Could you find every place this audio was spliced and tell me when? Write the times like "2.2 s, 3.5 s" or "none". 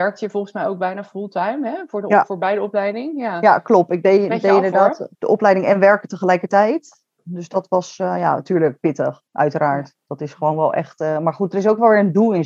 5.1 s, 9.3 s